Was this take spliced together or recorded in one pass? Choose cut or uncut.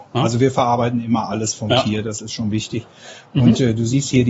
uncut